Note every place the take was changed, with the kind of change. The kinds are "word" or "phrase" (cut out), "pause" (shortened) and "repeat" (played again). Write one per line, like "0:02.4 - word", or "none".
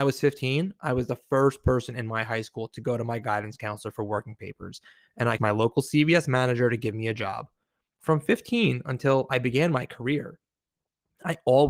0:05.4 - word